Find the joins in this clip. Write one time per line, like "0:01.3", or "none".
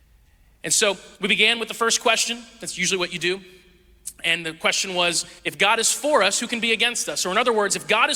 0:01.1
0:05.4